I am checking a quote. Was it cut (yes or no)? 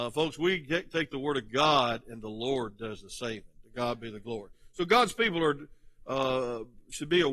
no